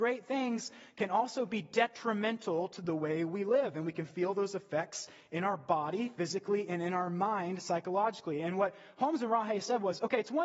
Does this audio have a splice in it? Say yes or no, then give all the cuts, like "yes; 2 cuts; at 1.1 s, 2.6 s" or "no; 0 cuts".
no; 0 cuts